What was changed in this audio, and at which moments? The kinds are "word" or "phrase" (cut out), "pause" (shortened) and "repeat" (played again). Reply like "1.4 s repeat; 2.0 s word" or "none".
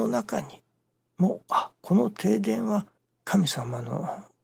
3.0 s pause